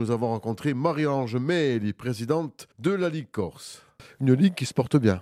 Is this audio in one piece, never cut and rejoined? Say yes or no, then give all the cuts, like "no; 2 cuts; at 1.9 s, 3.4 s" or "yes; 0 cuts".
no; 1 cut; at 2.7 s